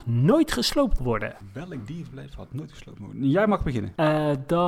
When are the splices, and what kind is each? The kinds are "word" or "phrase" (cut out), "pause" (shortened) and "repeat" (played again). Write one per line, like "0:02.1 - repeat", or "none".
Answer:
0:01.0 - word